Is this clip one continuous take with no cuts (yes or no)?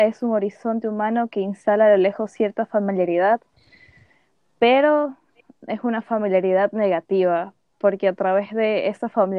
yes